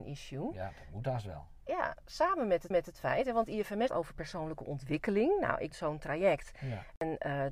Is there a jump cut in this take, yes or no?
yes